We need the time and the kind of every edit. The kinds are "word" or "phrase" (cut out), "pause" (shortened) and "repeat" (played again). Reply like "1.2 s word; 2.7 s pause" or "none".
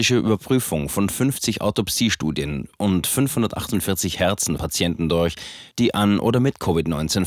4.6 s word